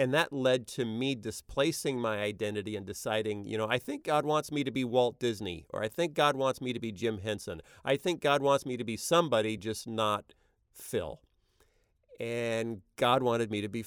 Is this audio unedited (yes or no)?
yes